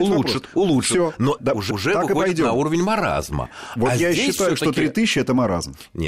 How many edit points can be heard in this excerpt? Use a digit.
2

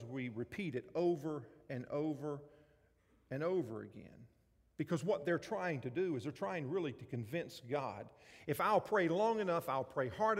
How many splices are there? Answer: 0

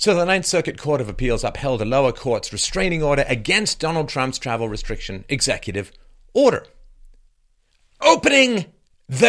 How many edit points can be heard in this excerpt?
0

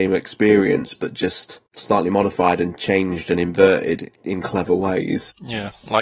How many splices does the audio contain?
0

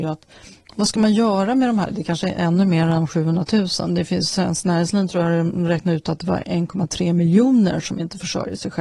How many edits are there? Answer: 0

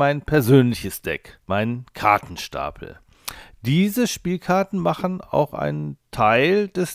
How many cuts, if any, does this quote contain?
1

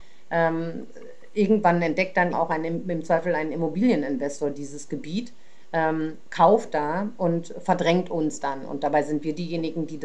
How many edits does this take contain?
1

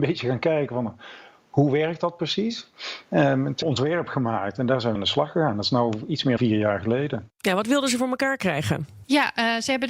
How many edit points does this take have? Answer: 3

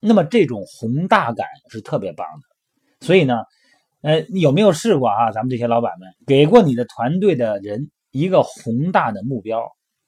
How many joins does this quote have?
1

